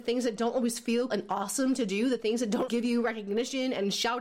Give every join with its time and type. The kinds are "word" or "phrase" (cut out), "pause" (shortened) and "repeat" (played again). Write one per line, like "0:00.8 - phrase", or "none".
0:01.1 - word
0:02.7 - word